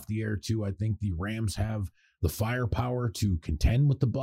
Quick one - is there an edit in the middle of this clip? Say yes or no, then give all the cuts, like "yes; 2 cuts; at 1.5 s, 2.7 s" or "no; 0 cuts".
no; 0 cuts